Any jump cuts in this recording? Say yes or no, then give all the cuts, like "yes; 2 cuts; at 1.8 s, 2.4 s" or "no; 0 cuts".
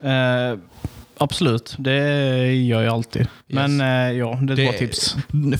no; 0 cuts